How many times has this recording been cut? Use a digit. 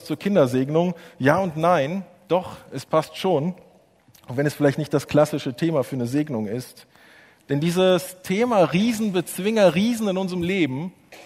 0